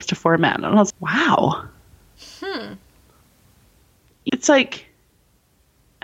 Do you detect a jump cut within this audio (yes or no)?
yes